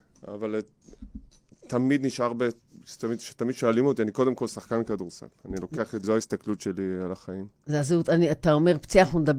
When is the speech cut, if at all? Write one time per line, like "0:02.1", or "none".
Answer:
0:06.0